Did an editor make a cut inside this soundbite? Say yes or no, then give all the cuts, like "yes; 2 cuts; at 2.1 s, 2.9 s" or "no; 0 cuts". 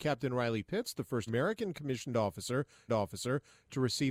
yes; 2 cuts; at 1.3 s, 2.9 s